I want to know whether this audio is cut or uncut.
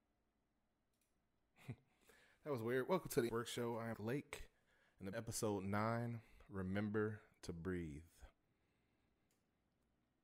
cut